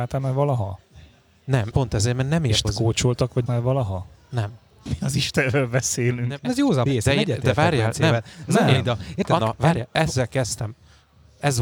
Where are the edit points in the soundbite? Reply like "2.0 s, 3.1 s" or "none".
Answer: 1.7 s, 2.6 s, 3.5 s, 4.9 s, 6.4 s, 6.9 s, 9.4 s